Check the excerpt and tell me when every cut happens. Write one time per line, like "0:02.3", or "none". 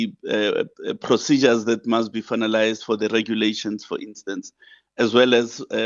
none

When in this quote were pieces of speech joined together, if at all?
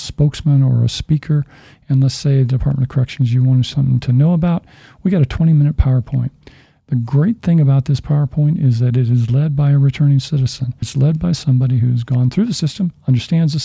0:10.8

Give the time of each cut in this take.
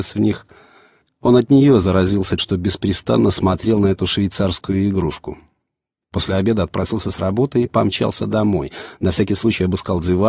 0:02.4

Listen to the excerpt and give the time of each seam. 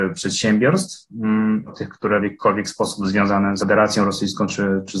0:01.7
0:02.2
0:03.6

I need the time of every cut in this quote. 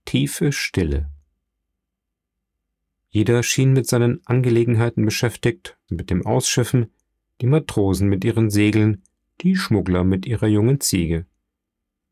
0:05.9

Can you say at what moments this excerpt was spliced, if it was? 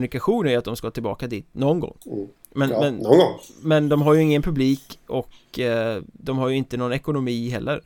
0:02.0

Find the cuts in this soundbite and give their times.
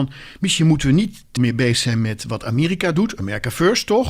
0:01.4

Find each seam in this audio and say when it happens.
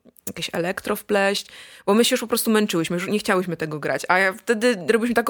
none

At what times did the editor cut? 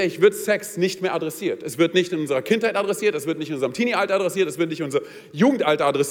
none

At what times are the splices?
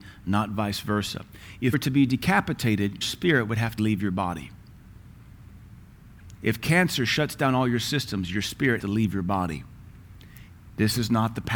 0:01.7
0:03.0
0:03.8
0:08.8

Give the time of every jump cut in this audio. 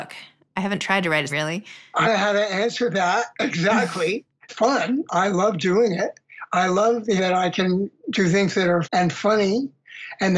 0:01.3
0:02.0
0:04.5
0:07.2
0:08.8

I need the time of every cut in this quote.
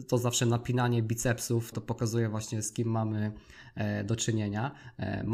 0:01.7

